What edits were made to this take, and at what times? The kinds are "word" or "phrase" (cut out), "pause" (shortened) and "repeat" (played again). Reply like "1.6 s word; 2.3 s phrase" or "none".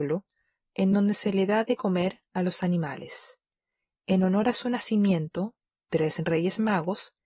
none